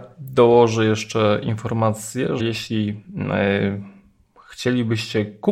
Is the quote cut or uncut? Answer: cut